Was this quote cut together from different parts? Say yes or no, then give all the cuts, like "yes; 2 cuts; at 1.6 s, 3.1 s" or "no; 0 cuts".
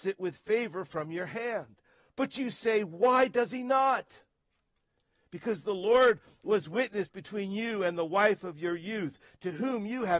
no; 0 cuts